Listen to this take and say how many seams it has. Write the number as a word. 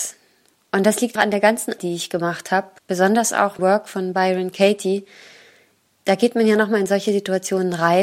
four